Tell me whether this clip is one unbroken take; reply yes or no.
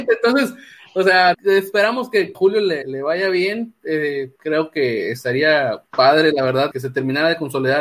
no